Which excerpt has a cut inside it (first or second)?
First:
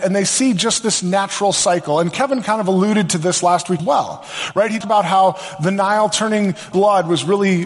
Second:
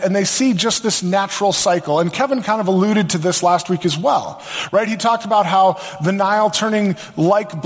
first